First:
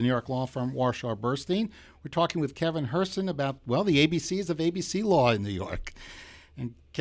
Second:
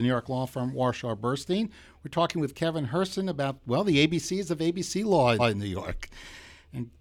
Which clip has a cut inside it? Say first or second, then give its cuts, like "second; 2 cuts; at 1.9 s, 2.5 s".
second; 1 cut; at 5.4 s